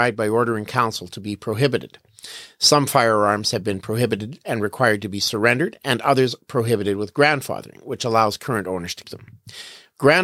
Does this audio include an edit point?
yes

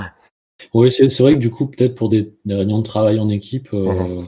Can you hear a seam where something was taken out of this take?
no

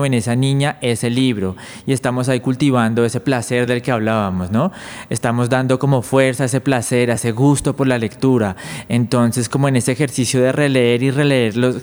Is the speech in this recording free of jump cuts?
yes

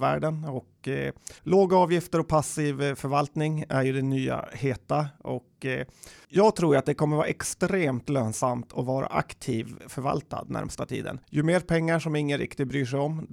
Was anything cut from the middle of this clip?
yes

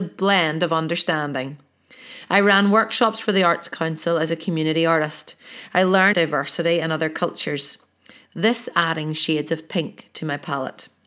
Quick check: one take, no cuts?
no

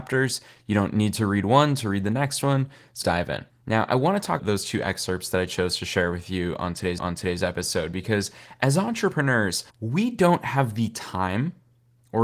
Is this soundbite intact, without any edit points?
no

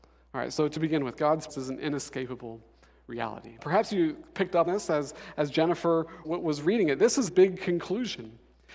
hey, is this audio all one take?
no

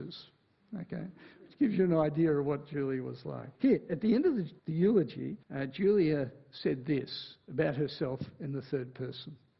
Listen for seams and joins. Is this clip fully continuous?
no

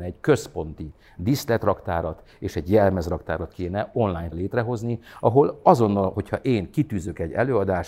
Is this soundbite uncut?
no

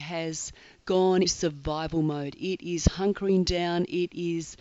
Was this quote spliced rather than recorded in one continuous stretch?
yes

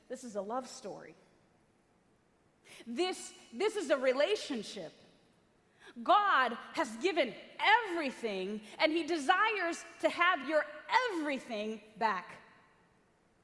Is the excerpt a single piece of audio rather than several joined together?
yes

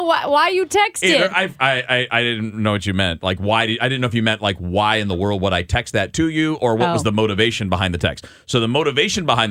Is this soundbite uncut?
yes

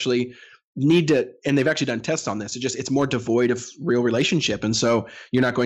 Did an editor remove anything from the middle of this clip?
no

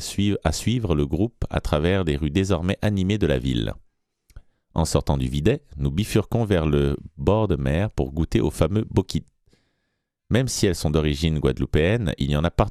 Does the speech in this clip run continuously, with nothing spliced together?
yes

